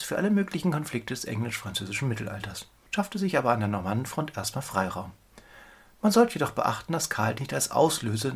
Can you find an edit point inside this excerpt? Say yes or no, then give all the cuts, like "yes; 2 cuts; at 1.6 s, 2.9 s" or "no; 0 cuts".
yes; 1 cut; at 7.4 s